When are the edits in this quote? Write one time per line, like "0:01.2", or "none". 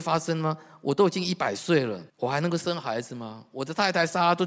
0:02.1